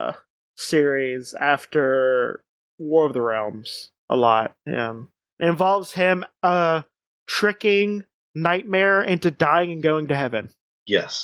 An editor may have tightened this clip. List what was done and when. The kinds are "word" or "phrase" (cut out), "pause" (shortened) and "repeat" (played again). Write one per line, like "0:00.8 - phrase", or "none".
0:04.0 - pause

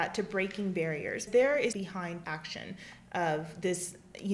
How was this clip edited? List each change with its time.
0:01.3 - word
0:01.7 - phrase
0:02.2 - word

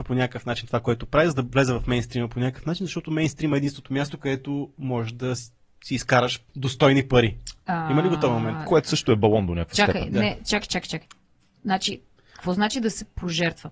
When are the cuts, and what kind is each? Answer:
0:06.5 - word

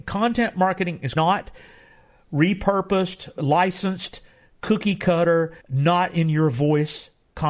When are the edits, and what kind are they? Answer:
0:01.2 - word
0:03.4 - word
0:05.6 - pause

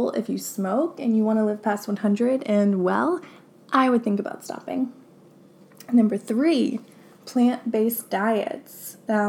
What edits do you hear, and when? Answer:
none

